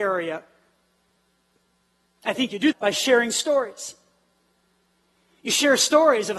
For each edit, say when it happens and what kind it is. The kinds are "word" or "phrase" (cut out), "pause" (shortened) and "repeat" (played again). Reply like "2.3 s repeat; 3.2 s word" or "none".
2.7 s word